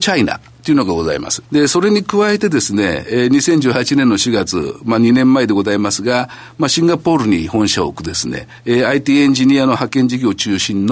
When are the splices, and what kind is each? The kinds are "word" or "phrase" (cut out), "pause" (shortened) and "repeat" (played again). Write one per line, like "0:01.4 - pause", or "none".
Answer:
0:01.5 - pause
0:08.6 - pause